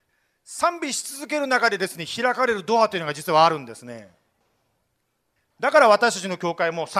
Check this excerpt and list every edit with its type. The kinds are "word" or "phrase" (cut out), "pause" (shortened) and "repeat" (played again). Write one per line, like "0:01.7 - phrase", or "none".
none